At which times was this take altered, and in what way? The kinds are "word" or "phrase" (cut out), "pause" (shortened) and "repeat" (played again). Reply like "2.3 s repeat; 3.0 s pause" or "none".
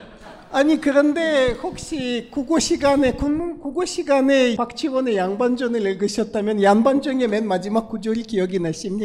4.6 s phrase